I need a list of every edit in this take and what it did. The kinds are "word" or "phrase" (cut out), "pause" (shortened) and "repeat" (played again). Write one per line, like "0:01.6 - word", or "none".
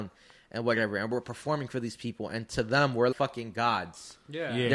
0:03.1 - word